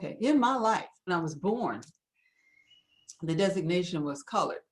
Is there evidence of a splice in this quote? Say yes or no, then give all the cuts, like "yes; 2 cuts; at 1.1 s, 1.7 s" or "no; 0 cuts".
yes; 1 cut; at 1.1 s